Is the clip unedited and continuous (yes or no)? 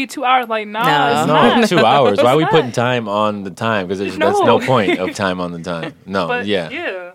no